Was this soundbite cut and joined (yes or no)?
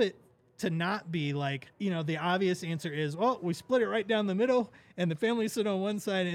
yes